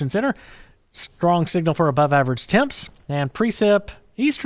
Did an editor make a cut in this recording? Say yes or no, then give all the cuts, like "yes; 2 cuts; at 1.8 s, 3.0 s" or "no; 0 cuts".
no; 0 cuts